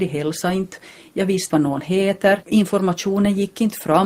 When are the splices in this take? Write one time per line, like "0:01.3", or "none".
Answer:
0:01.5